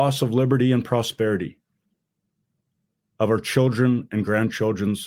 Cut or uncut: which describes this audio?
uncut